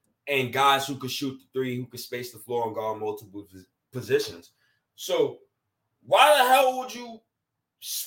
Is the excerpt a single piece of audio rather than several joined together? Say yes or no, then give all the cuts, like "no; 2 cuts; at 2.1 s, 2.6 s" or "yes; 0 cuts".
yes; 0 cuts